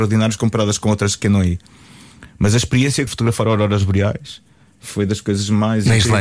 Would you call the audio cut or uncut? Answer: cut